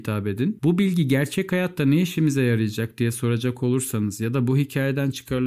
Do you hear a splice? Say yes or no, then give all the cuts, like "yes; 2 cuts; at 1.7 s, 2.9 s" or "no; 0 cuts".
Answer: no; 0 cuts